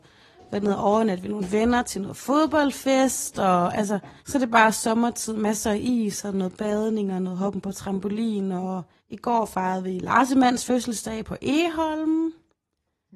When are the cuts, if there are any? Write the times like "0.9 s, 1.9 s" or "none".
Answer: 4.2 s, 9.0 s